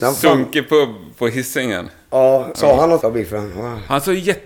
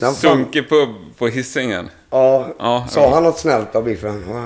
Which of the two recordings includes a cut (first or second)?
first